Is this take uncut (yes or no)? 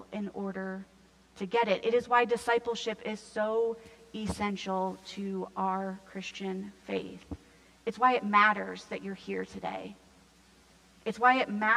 yes